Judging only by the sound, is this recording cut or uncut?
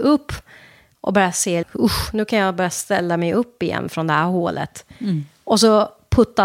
cut